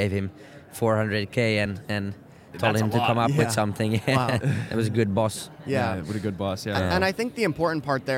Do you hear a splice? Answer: no; 0 cuts

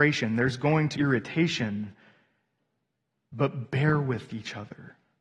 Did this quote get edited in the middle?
yes; 1 cut; at 0.9 s

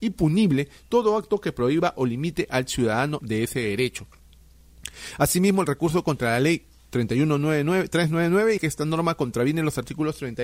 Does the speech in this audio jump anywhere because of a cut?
yes; 2 cuts; at 3.2 s, 8.6 s

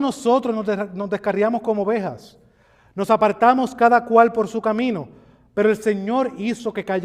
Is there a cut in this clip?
no; 0 cuts

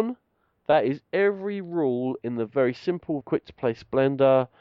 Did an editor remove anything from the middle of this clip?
yes; 1 cut; at 3.2 s

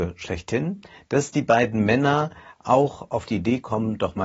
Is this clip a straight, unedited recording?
yes; 0 cuts

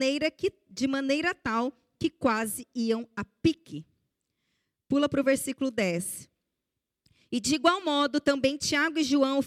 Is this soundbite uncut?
yes; 0 cuts

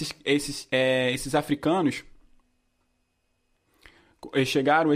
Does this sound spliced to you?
no; 0 cuts

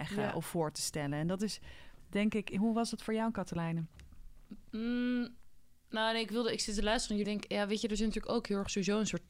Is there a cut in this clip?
yes; 1 cut; at 7.2 s

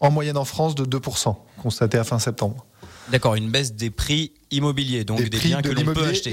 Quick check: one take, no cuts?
yes; 0 cuts

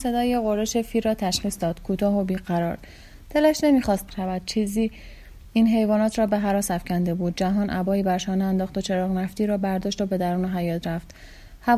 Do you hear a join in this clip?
yes; 1 cut; at 4.1 s

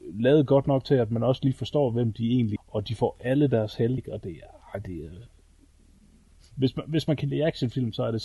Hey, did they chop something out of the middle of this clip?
yes; 2 cuts; at 2.6 s, 4.0 s

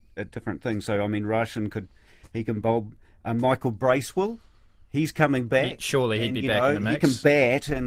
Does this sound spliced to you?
no; 0 cuts

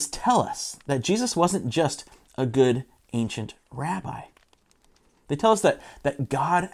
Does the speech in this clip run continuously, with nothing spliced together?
yes; 0 cuts

